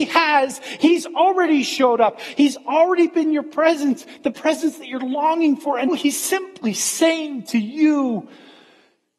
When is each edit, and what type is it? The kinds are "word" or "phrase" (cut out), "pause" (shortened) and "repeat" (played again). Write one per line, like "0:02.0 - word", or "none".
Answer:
0:05.9 - word